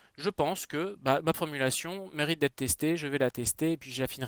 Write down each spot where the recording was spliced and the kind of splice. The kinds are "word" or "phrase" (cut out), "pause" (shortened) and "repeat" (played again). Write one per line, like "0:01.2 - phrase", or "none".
0:01.3 - word